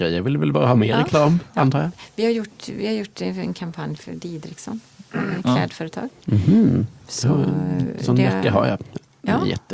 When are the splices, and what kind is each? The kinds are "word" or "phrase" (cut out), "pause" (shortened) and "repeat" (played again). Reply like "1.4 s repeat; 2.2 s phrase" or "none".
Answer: none